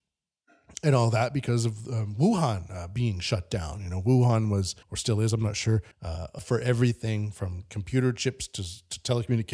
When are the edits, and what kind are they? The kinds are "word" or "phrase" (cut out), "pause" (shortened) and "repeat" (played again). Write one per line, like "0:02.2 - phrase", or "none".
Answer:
0:04.8 - pause
0:05.9 - pause
0:06.4 - phrase